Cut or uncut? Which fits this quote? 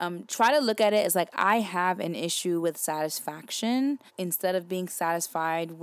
cut